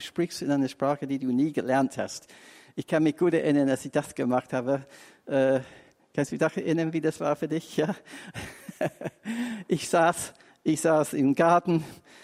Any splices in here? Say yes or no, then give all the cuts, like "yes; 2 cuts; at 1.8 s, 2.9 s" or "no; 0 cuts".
no; 0 cuts